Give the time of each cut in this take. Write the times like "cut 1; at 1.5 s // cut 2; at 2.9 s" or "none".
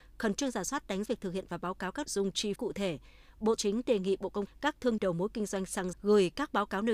cut 1; at 1.1 s // cut 2; at 2.1 s // cut 3; at 2.6 s // cut 4; at 3.6 s // cut 5; at 4.5 s // cut 6; at 5.0 s // cut 7; at 5.9 s